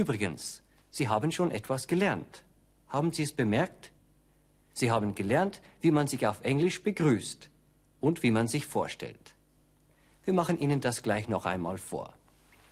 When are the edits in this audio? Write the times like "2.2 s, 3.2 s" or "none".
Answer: none